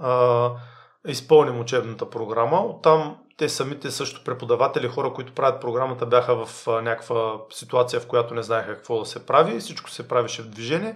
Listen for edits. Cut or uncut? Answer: uncut